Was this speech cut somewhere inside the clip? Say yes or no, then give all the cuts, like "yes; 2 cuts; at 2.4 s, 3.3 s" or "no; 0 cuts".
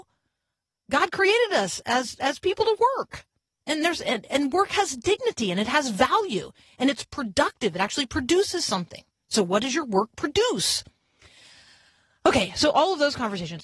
no; 0 cuts